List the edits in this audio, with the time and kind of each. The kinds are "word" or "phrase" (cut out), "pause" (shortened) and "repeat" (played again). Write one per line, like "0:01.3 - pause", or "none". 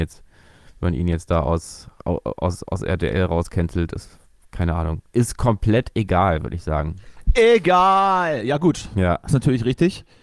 none